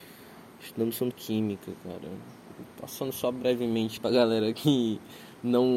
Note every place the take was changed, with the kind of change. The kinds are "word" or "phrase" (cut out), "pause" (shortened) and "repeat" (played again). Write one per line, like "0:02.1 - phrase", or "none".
0:01.1 - word
0:04.0 - word